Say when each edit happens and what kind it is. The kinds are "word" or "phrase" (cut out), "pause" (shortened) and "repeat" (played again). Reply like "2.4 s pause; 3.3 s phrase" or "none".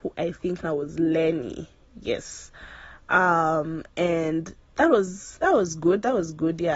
4.6 s pause